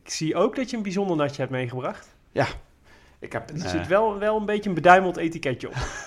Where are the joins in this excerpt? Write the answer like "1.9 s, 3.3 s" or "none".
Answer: none